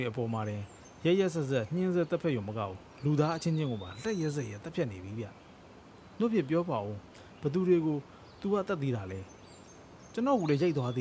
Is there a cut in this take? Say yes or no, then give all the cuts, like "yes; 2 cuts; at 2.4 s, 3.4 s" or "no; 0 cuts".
no; 0 cuts